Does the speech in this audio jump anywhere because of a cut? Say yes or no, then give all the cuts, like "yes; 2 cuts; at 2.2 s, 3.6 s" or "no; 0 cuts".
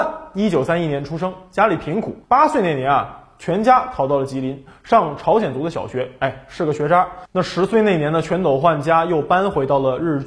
yes; 1 cut; at 2.2 s